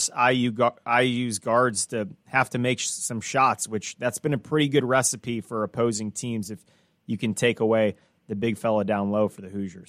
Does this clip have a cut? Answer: no; 0 cuts

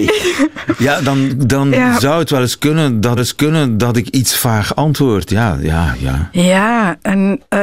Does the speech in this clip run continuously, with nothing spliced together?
no; 1 cut; at 3.2 s

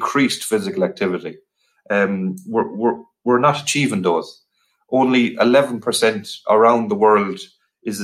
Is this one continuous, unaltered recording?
yes; 0 cuts

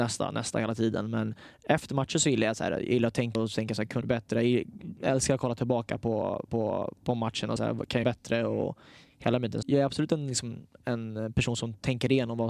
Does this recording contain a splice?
yes; 6 cuts; at 3.3 s, 4.0 s, 6.5 s, 7.6 s, 8.0 s, 9.6 s

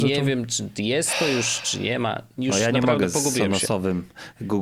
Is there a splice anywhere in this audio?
no; 0 cuts

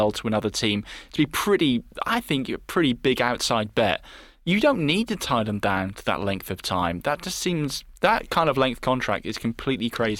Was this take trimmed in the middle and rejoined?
no; 0 cuts

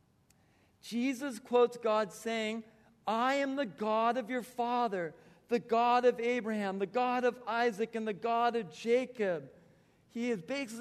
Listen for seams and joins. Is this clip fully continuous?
yes; 0 cuts

